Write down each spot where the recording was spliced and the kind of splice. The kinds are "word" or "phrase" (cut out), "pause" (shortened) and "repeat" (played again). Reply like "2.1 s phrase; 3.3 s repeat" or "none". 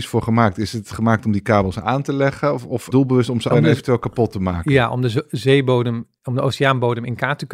2.9 s word; 3.5 s phrase

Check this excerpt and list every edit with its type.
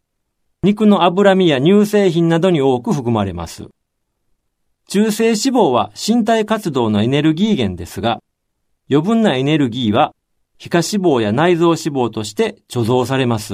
none

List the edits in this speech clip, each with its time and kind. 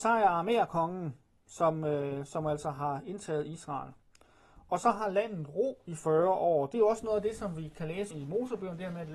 8.1 s word

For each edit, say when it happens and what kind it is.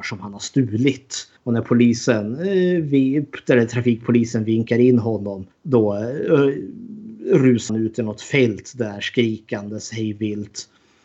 1.4 s pause; 5.5 s pause; 7.7 s word

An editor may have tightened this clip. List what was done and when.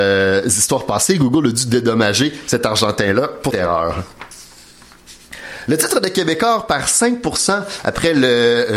3.5 s word

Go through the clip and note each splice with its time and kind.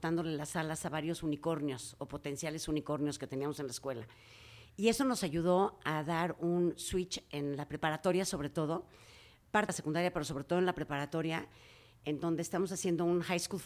9.7 s word

